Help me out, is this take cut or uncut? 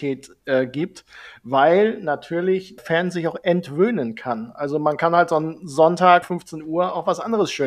cut